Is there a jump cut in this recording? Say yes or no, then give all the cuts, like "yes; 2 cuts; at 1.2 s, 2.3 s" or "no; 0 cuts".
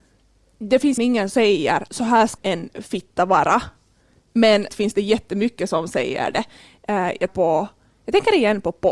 yes; 6 cuts; at 1.0 s, 1.3 s, 1.9 s, 2.4 s, 4.7 s, 7.3 s